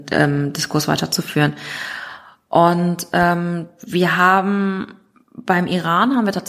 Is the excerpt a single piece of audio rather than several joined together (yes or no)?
yes